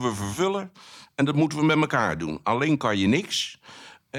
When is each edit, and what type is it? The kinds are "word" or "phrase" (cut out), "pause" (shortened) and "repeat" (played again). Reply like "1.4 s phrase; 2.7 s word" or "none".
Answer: none